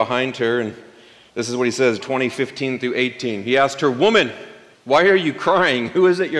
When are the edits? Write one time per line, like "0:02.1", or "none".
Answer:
0:02.0
0:04.7